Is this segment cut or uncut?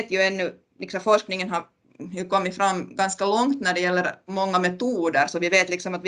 uncut